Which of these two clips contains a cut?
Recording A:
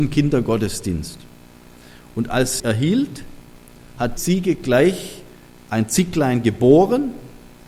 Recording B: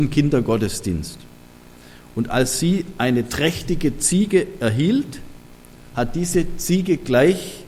A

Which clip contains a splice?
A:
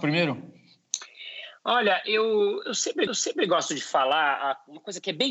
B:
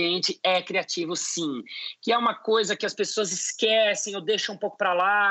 A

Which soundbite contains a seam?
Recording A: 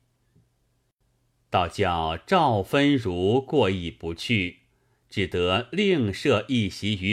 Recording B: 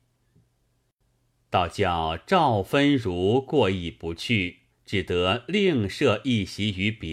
B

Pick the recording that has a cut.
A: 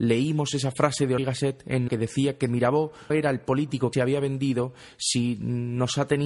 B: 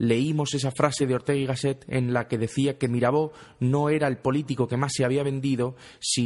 A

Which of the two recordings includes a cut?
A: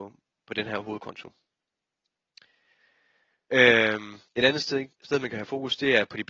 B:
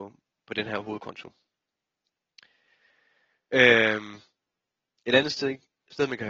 A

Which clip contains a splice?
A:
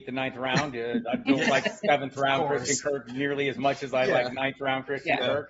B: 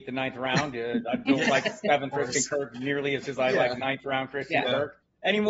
B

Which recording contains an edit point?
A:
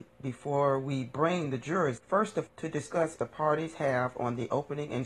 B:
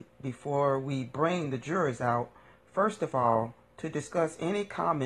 A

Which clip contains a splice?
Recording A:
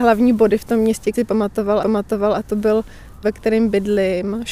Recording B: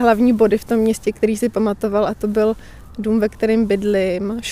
A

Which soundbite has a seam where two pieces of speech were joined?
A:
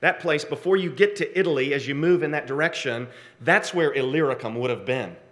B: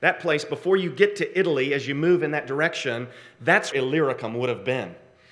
B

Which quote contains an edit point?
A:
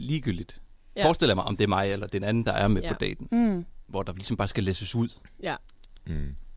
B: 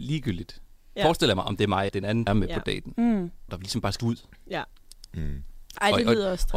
B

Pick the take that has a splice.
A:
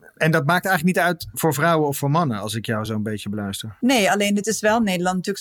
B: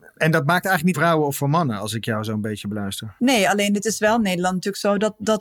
B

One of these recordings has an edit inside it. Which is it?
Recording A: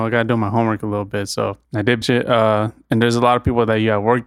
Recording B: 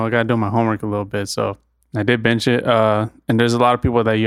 A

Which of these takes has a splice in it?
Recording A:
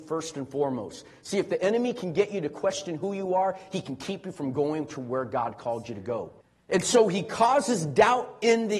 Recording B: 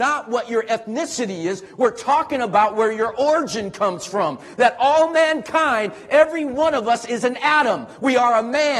A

